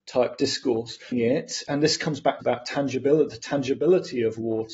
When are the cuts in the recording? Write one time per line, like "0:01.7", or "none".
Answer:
0:01.1
0:02.4

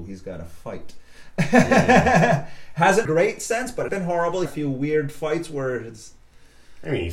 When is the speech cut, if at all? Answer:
0:03.1
0:03.9
0:04.5

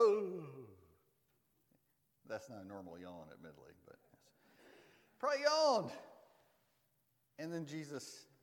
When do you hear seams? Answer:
none

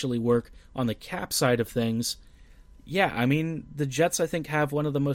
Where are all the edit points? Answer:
none

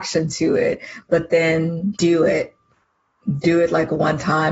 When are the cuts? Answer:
0:01.9

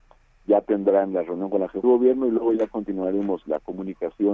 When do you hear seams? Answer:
0:01.8

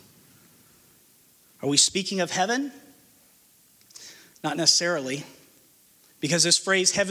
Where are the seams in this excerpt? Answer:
none

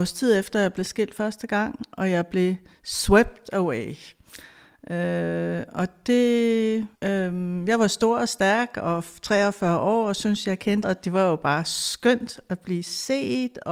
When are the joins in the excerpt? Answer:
0:07.0
0:10.8

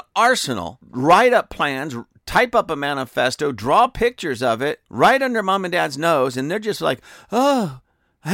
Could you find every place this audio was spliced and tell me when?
0:04.9

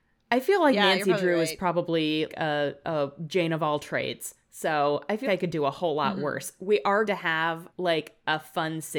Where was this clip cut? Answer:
0:02.3
0:05.2
0:07.1
0:07.7

